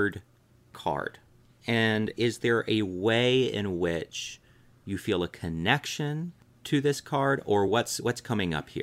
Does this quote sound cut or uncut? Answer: uncut